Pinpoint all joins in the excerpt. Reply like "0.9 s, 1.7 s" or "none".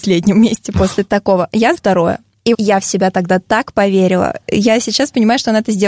1.7 s, 2.5 s